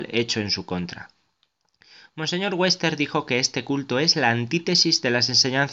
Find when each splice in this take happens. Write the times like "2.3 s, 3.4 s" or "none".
none